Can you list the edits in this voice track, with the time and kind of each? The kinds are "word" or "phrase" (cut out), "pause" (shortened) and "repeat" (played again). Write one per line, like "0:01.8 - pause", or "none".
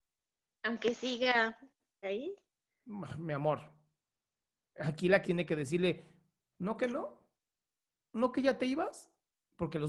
0:02.0 - word
0:05.2 - word